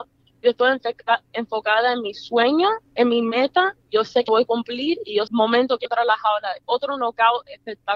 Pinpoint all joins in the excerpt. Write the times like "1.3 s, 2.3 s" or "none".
2.9 s, 4.3 s, 5.3 s, 5.8 s, 6.6 s